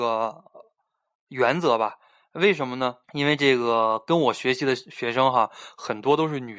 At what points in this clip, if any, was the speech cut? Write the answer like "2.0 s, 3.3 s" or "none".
3.0 s

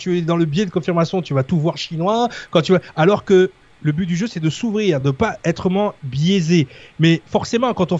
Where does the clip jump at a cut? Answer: none

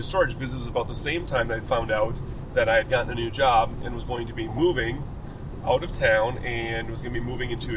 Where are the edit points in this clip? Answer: none

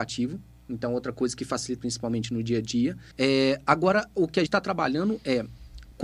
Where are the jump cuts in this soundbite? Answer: 1.8 s, 3.1 s, 4.5 s

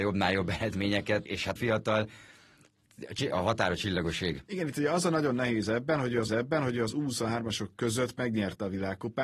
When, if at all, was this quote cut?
1.3 s, 1.6 s, 6.3 s

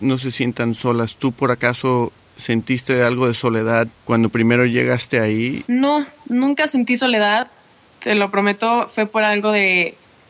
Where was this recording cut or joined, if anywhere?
none

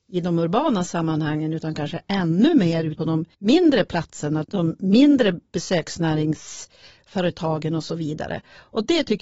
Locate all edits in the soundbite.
3.0 s, 3.3 s, 4.4 s

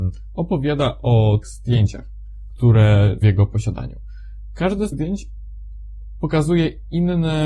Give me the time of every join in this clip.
1.4 s, 3.2 s, 4.9 s

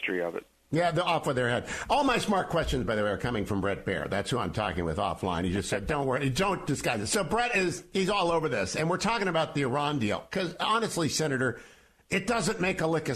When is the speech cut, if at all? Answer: none

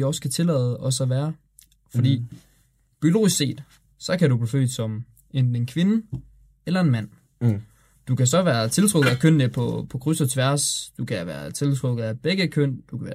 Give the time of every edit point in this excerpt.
none

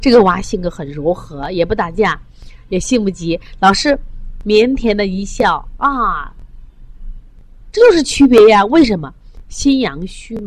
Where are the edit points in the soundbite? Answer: none

